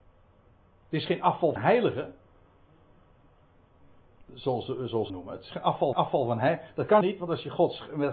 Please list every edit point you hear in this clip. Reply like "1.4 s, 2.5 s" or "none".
1.6 s, 5.1 s, 5.9 s, 7.0 s